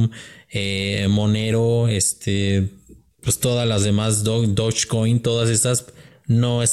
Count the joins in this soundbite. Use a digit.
0